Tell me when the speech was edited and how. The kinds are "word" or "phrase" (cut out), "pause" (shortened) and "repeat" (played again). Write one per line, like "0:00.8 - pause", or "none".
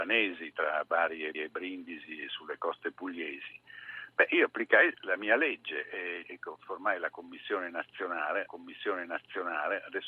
0:01.3 - repeat
0:06.2 - word
0:08.5 - repeat